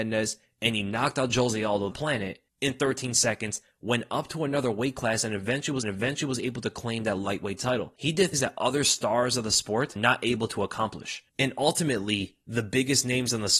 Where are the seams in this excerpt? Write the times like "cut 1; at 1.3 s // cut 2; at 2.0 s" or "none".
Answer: cut 1; at 1.9 s // cut 2; at 5.8 s // cut 3; at 8.3 s // cut 4; at 10.0 s // cut 5; at 11.3 s